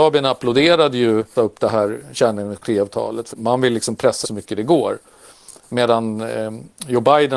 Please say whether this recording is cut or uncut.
cut